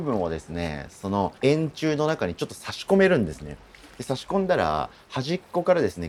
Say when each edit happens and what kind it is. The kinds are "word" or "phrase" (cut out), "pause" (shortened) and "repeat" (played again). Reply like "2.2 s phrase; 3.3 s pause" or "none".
1.4 s pause